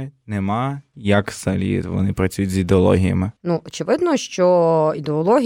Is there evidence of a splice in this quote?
yes; 1 cut; at 3.4 s

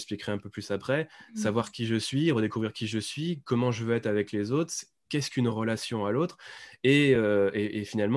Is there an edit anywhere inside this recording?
no; 0 cuts

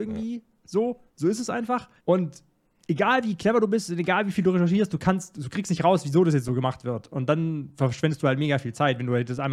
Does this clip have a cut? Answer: yes; 2 cuts; at 1.1 s, 2.0 s

